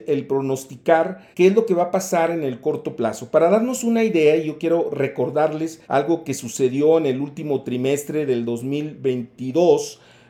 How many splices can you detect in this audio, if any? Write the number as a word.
two